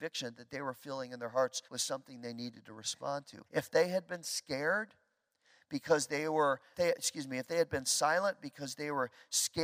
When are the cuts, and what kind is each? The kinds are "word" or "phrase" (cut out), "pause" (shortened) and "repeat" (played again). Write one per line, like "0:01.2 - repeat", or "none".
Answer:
0:01.6 - pause
0:03.5 - pause
0:06.7 - word